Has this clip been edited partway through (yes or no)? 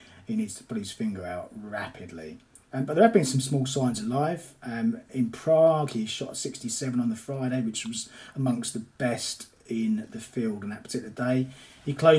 no